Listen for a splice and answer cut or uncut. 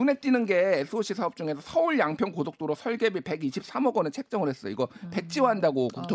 uncut